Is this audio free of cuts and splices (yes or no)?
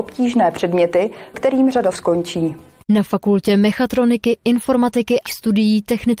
no